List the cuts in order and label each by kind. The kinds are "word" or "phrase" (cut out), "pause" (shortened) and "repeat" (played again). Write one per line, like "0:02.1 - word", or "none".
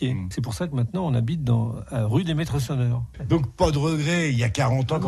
none